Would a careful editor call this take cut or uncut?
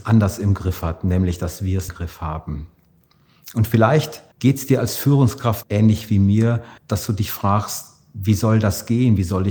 cut